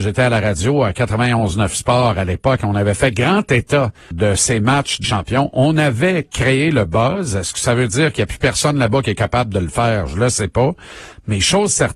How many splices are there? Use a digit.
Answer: 2